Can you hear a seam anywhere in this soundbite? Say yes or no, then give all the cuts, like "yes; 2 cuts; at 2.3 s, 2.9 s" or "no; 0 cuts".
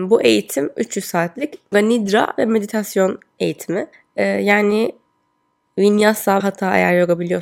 yes; 3 cuts; at 1.7 s, 3.9 s, 6.4 s